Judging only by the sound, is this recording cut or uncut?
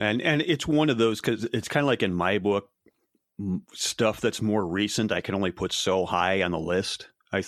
cut